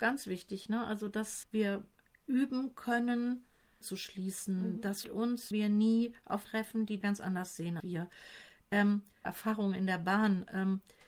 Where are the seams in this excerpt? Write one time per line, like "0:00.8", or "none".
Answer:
0:01.4
0:03.8
0:05.0
0:05.5
0:06.4
0:07.0
0:07.8
0:09.2